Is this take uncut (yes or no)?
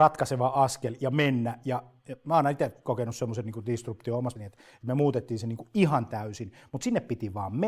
no